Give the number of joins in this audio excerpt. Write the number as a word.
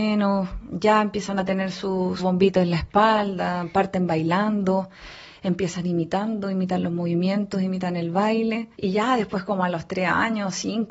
two